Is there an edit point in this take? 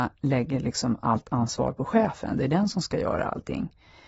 no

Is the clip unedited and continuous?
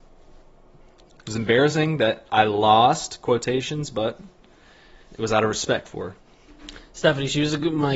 no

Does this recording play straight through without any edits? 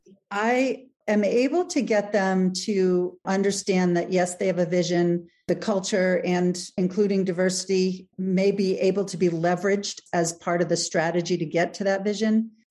yes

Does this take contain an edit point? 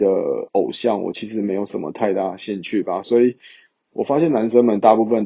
no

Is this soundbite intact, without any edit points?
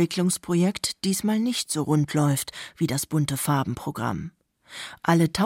yes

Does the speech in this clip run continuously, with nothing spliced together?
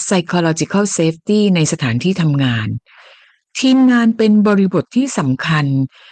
yes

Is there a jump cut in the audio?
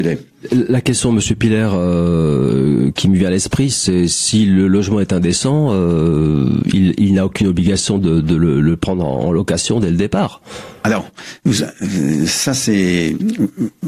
no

